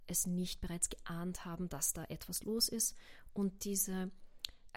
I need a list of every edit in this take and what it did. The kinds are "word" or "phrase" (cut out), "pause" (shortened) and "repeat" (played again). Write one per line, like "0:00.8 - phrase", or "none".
none